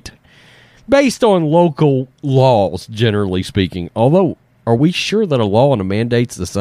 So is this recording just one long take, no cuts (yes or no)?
yes